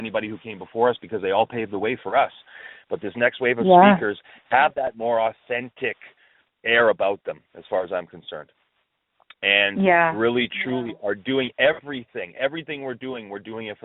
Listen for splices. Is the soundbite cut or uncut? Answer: uncut